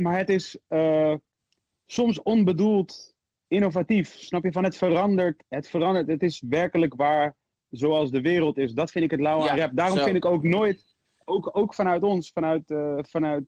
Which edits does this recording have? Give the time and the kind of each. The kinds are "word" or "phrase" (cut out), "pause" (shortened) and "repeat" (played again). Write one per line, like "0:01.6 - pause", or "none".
0:01.4 - pause